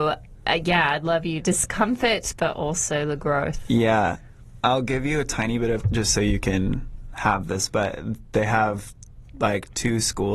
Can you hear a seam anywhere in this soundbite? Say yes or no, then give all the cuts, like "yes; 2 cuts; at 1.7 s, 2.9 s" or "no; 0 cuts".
yes; 2 cuts; at 1.4 s, 5.8 s